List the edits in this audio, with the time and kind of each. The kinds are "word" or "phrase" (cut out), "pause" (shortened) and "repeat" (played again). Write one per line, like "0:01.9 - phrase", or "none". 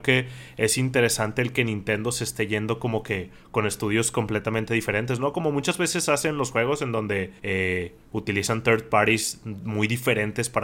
0:07.4 - pause